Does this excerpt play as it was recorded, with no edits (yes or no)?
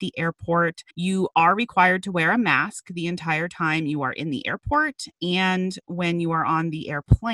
no